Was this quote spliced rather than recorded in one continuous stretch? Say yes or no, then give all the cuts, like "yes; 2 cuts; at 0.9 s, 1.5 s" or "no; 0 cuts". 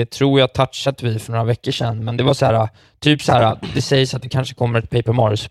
no; 0 cuts